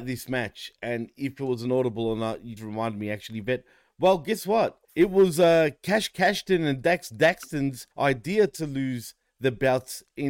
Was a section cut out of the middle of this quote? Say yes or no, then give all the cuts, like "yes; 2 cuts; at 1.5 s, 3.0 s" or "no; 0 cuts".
yes; 3 cuts; at 2.6 s, 4.8 s, 7.9 s